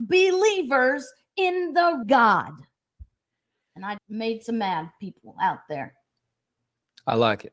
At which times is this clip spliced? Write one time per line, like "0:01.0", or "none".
0:02.0
0:04.0